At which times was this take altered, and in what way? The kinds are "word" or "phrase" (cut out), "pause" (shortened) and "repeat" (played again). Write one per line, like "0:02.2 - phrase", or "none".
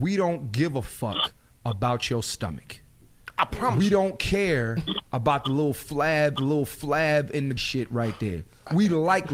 0:06.4 - repeat
0:07.6 - word